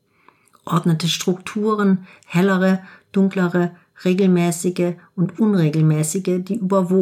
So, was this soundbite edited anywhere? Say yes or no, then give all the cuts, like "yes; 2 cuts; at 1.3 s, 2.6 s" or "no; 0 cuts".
no; 0 cuts